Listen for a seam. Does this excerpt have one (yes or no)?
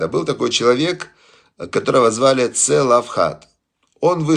no